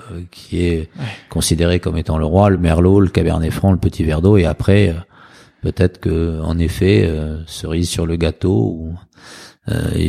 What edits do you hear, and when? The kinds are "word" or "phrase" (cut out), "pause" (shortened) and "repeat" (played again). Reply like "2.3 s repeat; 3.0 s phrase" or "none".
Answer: none